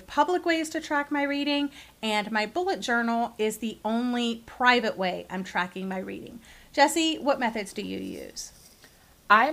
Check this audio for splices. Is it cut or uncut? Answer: uncut